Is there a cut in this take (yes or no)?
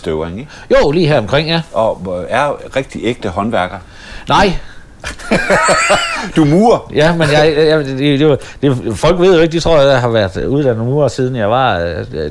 no